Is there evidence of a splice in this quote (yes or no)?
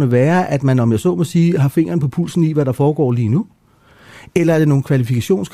no